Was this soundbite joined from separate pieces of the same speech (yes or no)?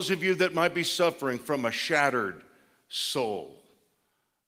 no